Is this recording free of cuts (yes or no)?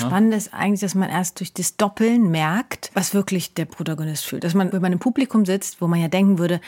yes